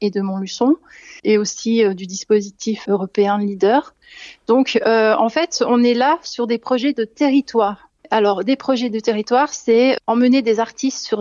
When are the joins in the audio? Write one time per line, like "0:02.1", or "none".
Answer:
0:01.2
0:02.8
0:08.0